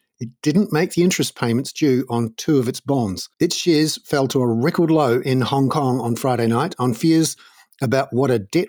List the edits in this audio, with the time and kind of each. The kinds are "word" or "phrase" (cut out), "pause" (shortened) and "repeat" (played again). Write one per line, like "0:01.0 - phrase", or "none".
0:03.3 - pause

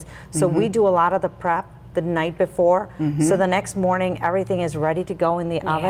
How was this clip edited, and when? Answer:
none

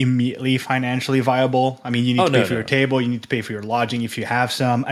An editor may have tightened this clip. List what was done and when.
none

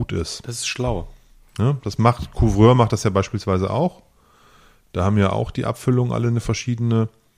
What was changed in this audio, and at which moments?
none

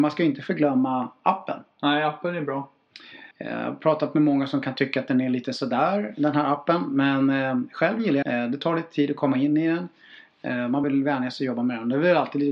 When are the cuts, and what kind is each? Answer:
0:03.3 - pause
0:08.2 - word
0:10.8 - word

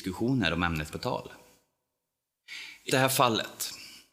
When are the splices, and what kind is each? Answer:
0:00.9 - word
0:02.9 - word

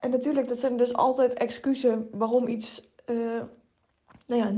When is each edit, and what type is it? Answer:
none

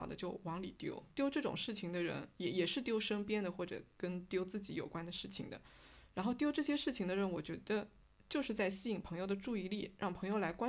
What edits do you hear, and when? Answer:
0:01.1 - pause

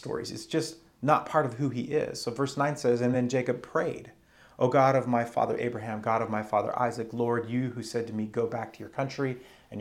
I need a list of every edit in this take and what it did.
none

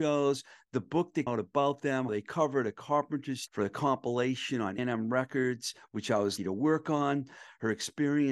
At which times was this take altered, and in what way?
0:01.3 - word
0:02.1 - word
0:03.5 - word
0:04.8 - word
0:06.4 - word

